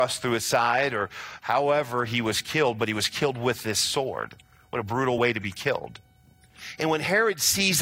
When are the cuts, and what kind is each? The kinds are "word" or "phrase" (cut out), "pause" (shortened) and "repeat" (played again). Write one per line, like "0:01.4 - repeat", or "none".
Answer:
none